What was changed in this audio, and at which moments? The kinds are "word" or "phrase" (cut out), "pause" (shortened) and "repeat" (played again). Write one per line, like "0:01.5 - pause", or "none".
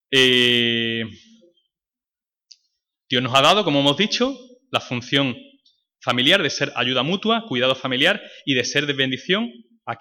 none